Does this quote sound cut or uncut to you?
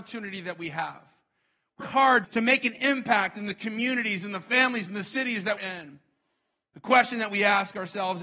cut